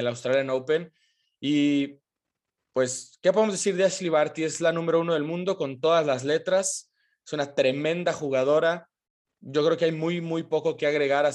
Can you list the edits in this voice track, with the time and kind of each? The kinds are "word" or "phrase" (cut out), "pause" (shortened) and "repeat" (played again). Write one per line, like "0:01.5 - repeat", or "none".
none